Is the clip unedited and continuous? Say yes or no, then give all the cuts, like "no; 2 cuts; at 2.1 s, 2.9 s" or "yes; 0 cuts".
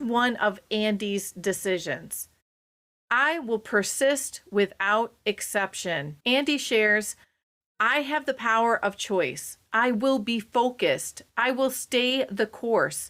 no; 1 cut; at 6.2 s